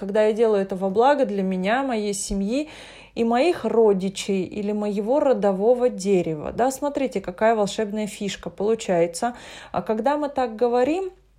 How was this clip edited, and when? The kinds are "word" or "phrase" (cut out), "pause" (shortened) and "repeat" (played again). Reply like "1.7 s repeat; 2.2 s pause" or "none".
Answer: none